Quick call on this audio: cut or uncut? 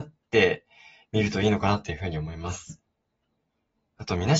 uncut